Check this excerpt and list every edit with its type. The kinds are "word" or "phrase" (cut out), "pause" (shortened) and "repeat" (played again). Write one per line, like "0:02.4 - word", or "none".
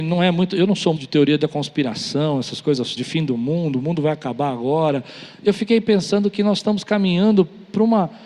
0:01.0 - word
0:03.0 - word